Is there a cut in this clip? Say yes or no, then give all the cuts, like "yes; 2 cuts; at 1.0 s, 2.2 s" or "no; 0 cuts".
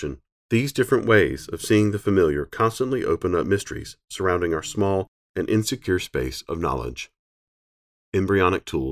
no; 0 cuts